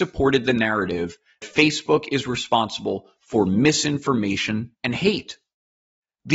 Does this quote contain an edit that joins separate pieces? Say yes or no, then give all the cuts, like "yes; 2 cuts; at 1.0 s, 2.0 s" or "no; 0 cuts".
yes; 2 cuts; at 1.4 s, 4.7 s